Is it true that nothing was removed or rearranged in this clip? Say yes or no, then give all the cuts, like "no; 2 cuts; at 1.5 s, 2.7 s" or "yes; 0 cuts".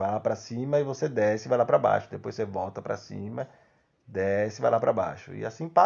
yes; 0 cuts